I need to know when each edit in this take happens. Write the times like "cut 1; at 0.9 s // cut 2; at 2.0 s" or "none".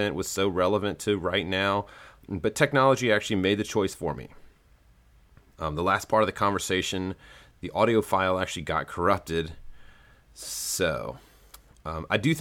none